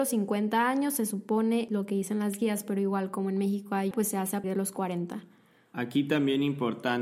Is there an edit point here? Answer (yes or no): yes